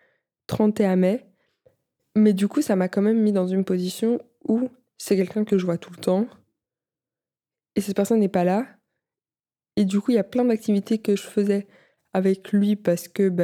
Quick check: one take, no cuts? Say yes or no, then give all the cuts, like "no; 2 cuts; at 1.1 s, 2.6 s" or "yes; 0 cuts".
yes; 0 cuts